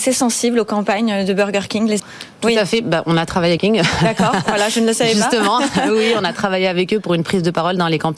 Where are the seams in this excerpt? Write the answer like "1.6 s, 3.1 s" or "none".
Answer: 2.0 s, 3.6 s